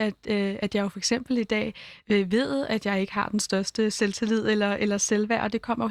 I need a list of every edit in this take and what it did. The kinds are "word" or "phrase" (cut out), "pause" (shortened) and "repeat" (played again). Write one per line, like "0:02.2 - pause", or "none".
none

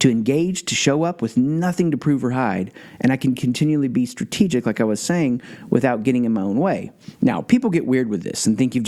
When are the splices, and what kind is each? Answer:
none

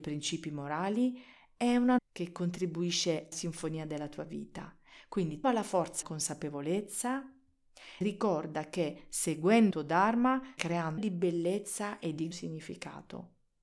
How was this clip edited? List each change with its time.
0:02.0 - word
0:03.3 - word
0:05.4 - word
0:06.0 - word
0:08.0 - word
0:09.7 - word
0:10.6 - word
0:11.0 - word
0:12.3 - word

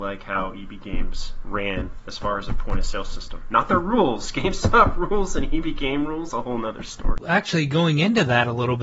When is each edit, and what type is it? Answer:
0:06.3 - word

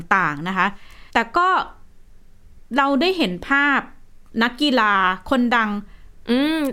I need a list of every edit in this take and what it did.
0:01.1 - pause

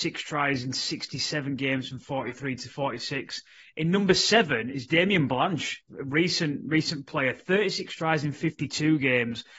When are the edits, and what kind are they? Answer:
none

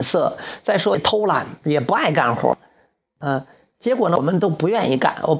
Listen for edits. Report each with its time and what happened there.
none

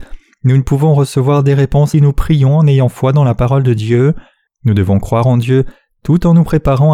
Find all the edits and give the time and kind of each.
0:01.9 - phrase
0:04.5 - pause

